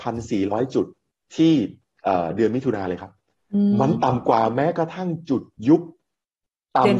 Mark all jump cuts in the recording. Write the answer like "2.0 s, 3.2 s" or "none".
none